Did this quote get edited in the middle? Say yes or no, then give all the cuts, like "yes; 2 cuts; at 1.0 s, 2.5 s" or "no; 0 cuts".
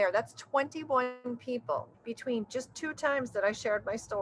yes; 1 cut; at 1.9 s